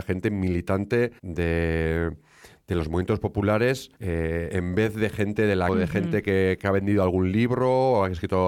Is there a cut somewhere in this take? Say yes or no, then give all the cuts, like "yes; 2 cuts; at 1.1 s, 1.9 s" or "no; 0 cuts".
yes; 4 cuts; at 1.2 s, 4.0 s, 5.7 s, 6.6 s